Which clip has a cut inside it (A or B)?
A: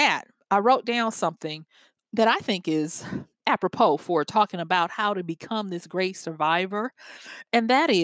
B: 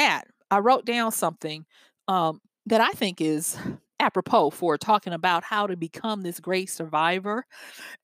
A